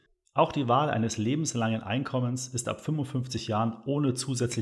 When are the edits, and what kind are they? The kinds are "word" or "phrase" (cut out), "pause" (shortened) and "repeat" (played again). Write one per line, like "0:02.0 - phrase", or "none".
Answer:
none